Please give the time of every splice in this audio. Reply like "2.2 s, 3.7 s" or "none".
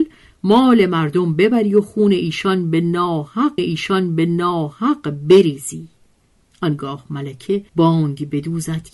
3.6 s, 7.7 s